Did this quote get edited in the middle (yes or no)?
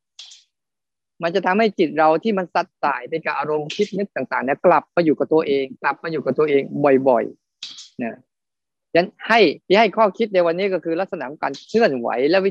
yes